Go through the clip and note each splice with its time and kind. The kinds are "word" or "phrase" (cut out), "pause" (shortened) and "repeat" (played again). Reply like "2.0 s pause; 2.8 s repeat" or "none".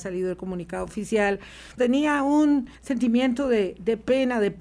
1.8 s word; 2.8 s pause